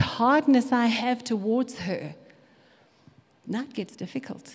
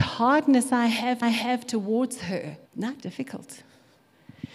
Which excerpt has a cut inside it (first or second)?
second